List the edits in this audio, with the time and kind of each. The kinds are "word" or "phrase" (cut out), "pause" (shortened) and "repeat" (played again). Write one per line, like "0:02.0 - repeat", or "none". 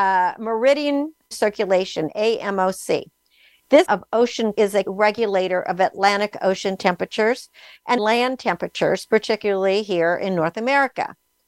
0:01.3 - word
0:03.8 - word
0:04.5 - word
0:04.8 - word
0:08.0 - phrase

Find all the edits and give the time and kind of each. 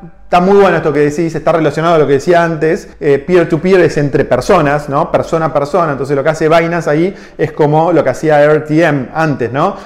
0:02.9 - pause

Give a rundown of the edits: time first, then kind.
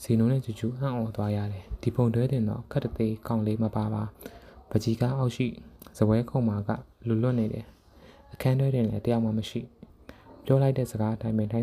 0:04.1 - pause
0:09.9 - pause

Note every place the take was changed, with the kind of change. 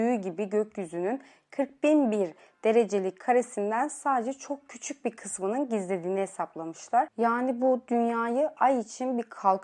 none

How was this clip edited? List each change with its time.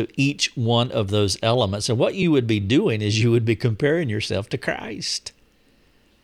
none

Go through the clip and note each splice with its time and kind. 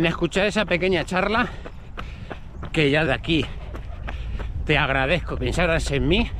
0:03.1 - word
0:05.4 - word

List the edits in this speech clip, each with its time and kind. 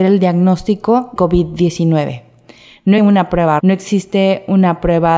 0:01.2 - word
0:03.0 - word
0:03.6 - word

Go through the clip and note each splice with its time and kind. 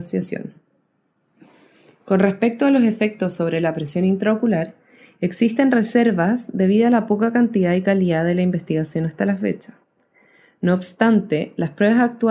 none

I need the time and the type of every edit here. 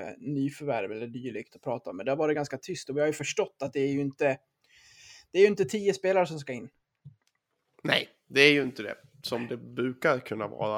none

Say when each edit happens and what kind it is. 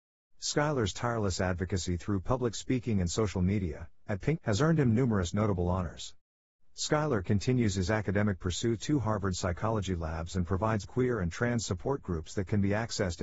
0:04.4 - word
0:08.8 - word
0:10.8 - word

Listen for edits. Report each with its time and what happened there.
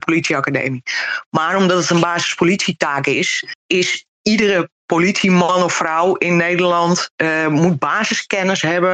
none

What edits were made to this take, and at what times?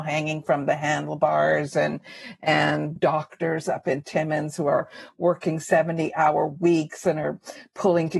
0:03.0 - phrase

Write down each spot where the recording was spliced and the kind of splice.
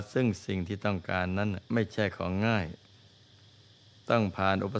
0:01.7 - pause

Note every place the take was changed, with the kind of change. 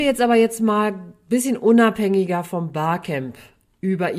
none

